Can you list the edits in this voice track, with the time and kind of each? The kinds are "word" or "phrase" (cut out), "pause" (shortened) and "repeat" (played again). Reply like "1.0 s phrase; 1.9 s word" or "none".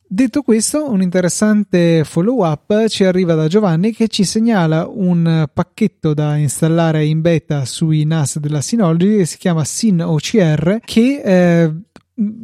10.8 s pause